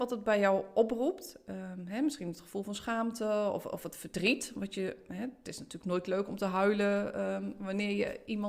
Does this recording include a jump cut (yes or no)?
no